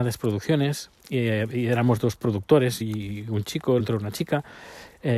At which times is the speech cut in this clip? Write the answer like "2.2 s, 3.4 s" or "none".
1.0 s, 2.8 s, 3.8 s